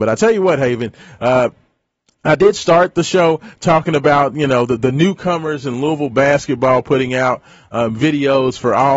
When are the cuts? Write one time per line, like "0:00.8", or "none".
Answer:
none